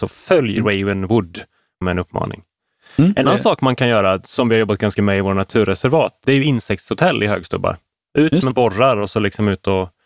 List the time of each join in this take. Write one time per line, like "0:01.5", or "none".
0:01.8
0:03.3
0:05.0
0:06.2
0:08.5